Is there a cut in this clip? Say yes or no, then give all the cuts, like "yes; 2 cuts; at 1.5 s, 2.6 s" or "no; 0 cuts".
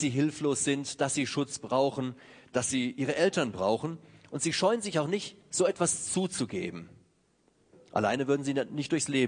no; 0 cuts